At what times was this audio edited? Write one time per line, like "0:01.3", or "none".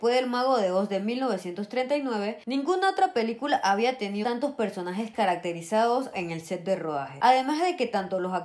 0:04.2
0:06.1